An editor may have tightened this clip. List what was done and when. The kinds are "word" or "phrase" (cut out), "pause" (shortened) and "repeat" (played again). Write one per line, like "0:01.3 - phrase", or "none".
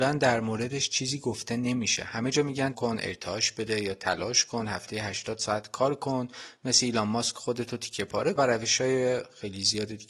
0:02.7 - word
0:08.4 - word